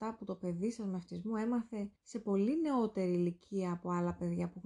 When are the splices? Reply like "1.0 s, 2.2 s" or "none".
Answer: 2.0 s